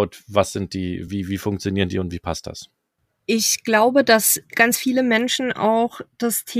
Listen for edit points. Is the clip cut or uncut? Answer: uncut